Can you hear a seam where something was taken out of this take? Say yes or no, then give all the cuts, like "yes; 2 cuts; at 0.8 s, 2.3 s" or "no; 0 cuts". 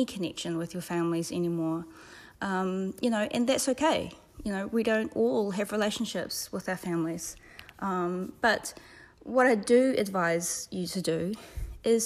no; 0 cuts